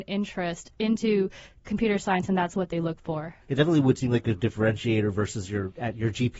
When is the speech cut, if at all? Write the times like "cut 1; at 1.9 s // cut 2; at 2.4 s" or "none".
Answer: cut 1; at 3.4 s